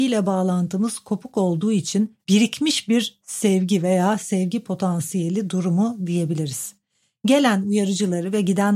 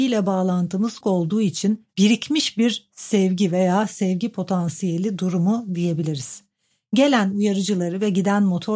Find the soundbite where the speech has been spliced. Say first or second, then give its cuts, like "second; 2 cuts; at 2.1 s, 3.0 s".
second; 1 cut; at 1.0 s